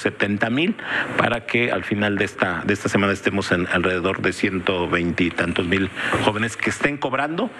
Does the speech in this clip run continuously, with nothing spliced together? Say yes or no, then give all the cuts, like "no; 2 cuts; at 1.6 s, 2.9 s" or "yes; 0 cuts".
yes; 0 cuts